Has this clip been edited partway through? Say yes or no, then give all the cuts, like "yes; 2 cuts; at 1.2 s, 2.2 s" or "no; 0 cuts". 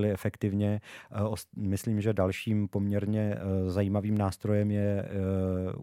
no; 0 cuts